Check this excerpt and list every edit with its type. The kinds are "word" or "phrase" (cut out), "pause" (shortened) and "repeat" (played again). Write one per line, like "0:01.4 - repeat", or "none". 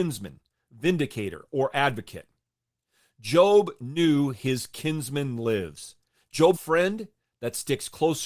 0:06.5 - phrase